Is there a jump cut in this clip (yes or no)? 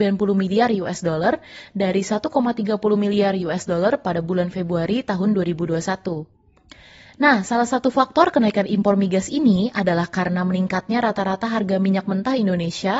no